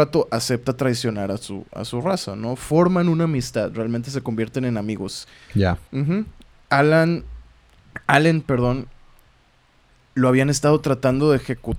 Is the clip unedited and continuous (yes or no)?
no